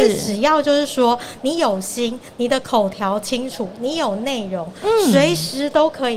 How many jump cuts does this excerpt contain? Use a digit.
0